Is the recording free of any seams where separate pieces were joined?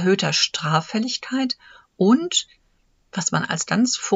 yes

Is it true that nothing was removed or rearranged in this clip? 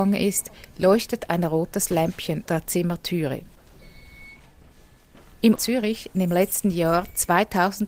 no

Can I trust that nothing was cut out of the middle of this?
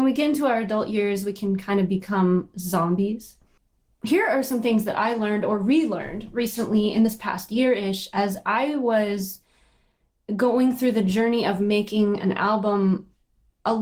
yes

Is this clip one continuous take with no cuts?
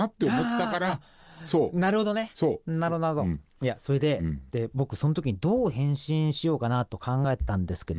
yes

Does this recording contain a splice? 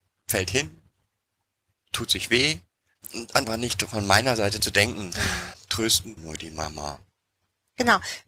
yes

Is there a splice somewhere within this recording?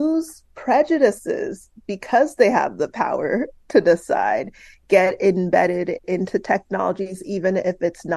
no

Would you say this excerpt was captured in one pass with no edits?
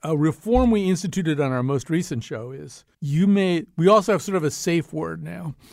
no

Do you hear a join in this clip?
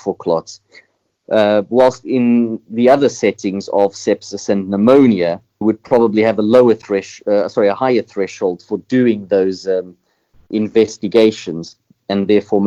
yes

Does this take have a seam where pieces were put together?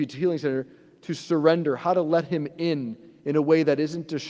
no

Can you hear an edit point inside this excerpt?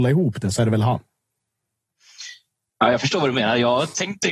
no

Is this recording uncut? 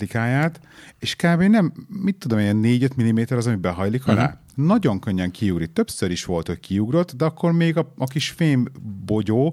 yes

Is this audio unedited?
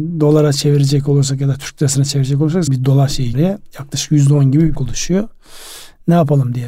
no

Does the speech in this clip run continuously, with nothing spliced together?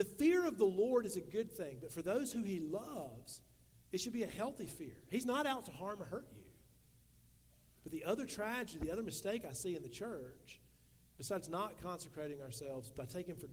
yes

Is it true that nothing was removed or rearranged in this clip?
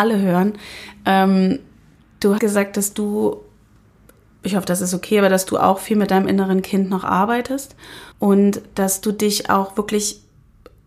no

